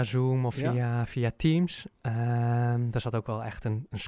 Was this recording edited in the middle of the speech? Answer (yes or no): no